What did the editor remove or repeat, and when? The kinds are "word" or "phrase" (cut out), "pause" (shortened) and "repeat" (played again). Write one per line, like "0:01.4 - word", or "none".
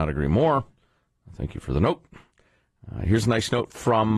none